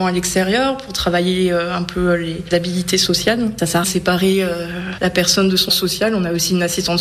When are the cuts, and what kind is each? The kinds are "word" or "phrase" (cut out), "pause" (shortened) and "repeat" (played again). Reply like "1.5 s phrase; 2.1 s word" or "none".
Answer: 3.8 s word; 5.7 s word

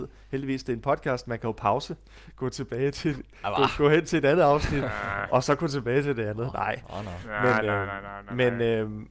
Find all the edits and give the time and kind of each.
none

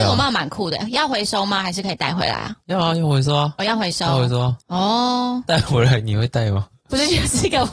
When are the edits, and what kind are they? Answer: 2.6 s pause; 4.6 s pause

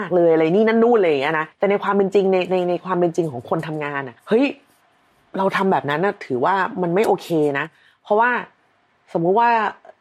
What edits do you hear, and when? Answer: 1.5 s pause; 4.2 s pause

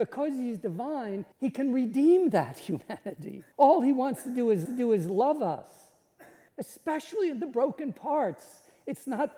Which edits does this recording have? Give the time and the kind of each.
1.3 s pause; 3.5 s pause; 4.6 s repeat; 6.5 s pause

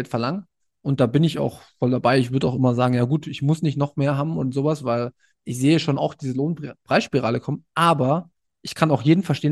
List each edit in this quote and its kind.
none

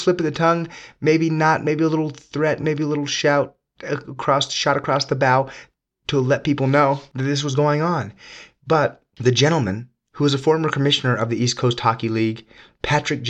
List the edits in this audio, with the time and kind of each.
none

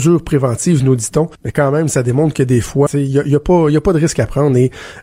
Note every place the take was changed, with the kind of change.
1.4 s pause; 2.9 s word

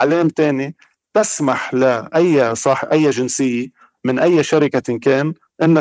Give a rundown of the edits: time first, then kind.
none

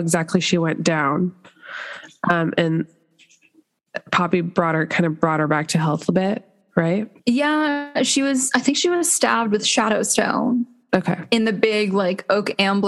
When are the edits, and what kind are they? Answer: 7.2 s pause

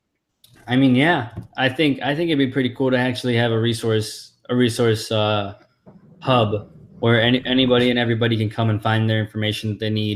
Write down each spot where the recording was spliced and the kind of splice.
none

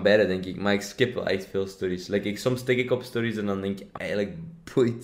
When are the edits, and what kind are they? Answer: 4.0 s word

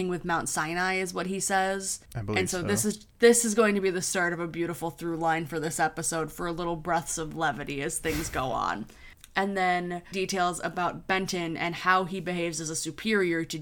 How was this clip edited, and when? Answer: 2.1 s pause; 3.1 s pause; 10.1 s phrase

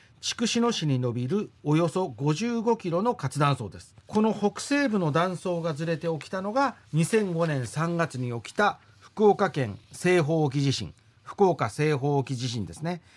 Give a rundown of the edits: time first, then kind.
4.0 s pause; 6.9 s pause; 9.8 s pause

